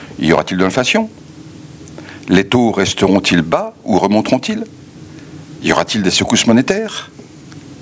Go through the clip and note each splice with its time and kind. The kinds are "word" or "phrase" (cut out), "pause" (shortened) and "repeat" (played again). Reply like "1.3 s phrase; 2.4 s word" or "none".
none